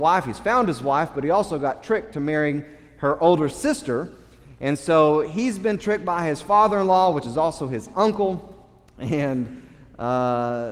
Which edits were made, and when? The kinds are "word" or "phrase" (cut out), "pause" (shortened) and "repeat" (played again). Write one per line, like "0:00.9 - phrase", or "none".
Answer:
none